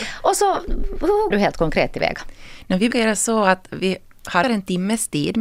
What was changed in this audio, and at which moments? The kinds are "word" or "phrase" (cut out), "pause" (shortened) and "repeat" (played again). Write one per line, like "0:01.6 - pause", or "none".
0:01.3 - word
0:02.9 - word
0:04.4 - word